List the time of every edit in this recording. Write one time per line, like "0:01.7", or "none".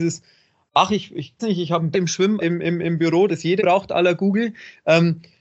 0:01.4
0:01.9
0:02.4
0:03.3
0:03.6